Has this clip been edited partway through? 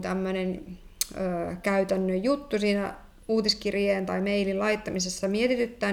no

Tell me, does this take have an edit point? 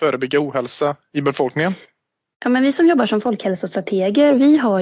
no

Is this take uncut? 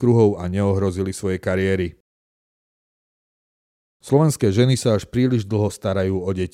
yes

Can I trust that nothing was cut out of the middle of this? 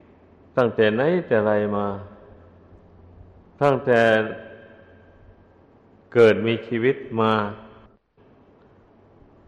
yes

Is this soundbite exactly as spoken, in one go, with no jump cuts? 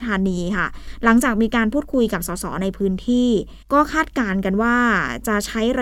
no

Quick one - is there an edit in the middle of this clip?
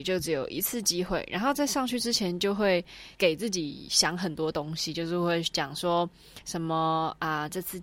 yes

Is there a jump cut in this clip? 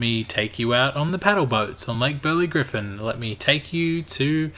no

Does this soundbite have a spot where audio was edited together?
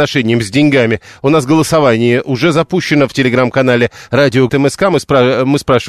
yes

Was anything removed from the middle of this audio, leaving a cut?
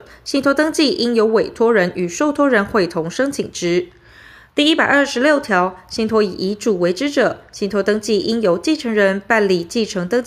no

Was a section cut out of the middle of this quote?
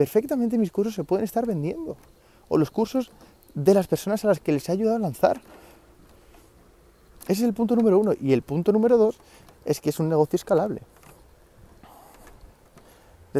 no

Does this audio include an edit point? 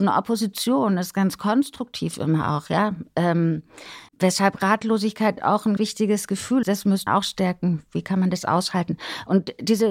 yes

